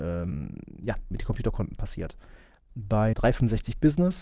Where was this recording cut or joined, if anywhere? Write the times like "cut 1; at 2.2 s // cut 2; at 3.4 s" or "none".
cut 1; at 1.1 s // cut 2; at 3.1 s

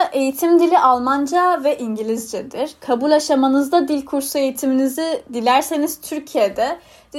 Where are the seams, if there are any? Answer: none

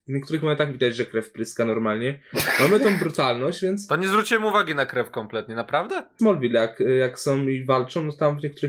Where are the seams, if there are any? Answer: none

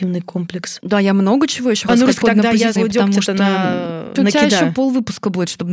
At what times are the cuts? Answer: cut 1; at 1.9 s // cut 2; at 2.2 s // cut 3; at 2.8 s // cut 4; at 4.2 s

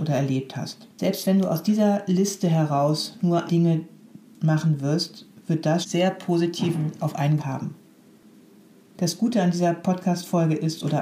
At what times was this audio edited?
cut 1; at 0.9 s // cut 2; at 3.5 s // cut 3; at 5.8 s // cut 4; at 7.0 s // cut 5; at 7.4 s

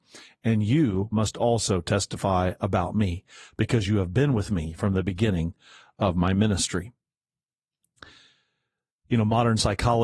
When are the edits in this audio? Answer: none

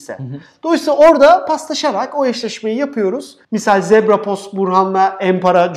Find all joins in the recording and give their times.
cut 1; at 3.4 s

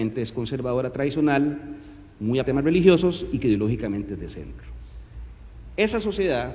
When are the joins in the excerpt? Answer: cut 1; at 2.4 s

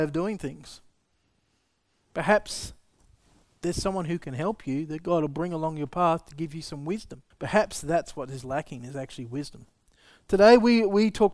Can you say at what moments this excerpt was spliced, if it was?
cut 1; at 7.3 s

